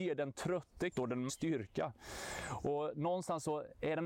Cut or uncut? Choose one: cut